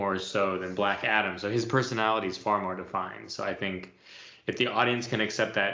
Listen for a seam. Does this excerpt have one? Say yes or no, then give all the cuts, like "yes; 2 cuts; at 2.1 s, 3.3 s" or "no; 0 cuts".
no; 0 cuts